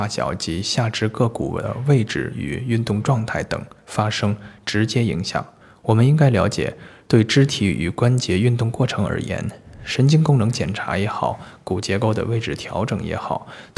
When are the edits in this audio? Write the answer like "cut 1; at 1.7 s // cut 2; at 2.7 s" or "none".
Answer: cut 1; at 5.6 s